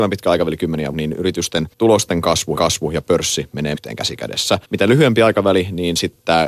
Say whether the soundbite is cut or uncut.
cut